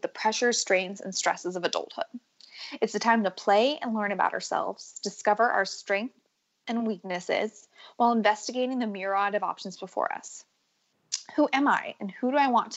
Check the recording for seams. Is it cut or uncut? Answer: uncut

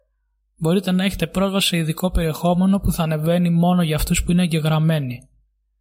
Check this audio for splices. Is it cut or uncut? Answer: uncut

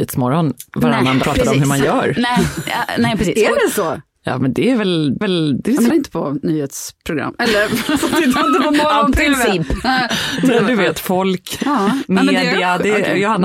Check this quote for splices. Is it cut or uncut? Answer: cut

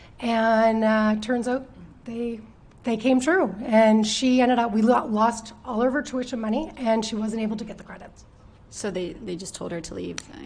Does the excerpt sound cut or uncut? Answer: cut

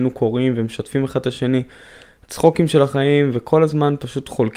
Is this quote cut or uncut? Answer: uncut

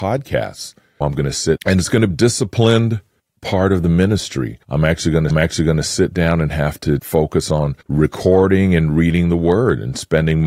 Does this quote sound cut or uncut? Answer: cut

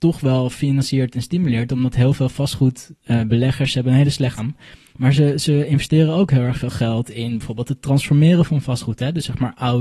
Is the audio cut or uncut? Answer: cut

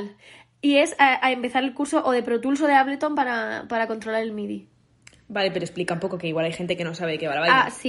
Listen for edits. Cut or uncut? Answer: uncut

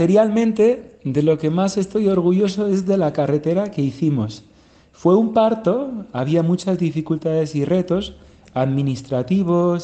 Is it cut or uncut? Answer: uncut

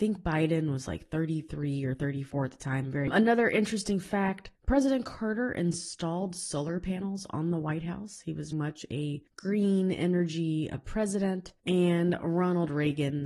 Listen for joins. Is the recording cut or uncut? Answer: cut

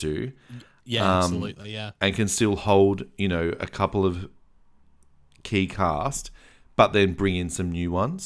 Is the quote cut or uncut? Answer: uncut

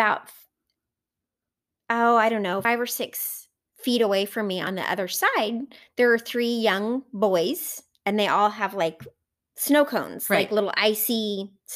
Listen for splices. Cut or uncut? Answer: uncut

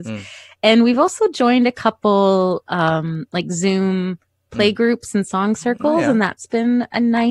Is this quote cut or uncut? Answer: uncut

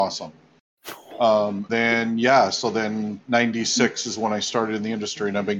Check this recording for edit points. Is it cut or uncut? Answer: cut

